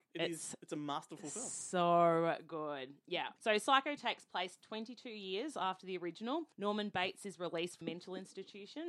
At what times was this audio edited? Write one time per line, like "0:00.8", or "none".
0:03.4
0:04.0
0:06.5
0:07.8